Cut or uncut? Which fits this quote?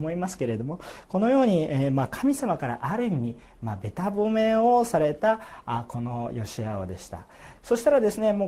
cut